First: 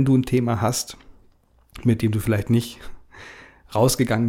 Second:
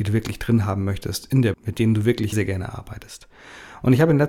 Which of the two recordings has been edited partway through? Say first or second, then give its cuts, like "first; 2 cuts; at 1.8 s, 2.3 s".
second; 2 cuts; at 1.5 s, 2.3 s